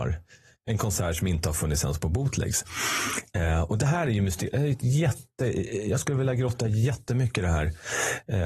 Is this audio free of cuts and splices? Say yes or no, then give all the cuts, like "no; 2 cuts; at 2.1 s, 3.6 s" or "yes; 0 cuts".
yes; 0 cuts